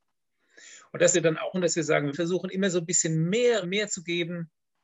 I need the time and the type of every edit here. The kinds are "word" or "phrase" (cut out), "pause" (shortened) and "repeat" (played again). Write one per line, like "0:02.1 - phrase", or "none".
0:01.1 - phrase
0:01.5 - word
0:02.1 - word
0:03.6 - word